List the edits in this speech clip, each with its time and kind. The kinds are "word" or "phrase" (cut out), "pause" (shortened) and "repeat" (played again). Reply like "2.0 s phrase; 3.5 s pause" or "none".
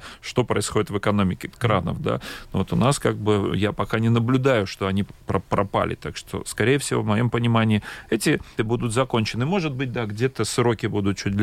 1.5 s word; 8.6 s word